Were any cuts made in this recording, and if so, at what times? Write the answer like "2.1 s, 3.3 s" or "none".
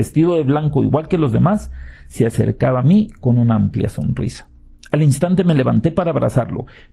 none